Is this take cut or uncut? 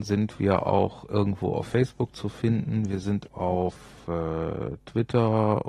cut